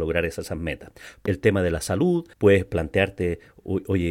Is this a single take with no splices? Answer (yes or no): no